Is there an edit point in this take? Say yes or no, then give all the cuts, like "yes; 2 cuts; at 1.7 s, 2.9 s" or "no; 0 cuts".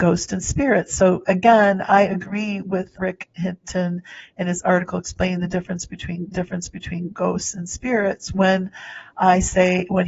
yes; 2 cuts; at 3.0 s, 6.3 s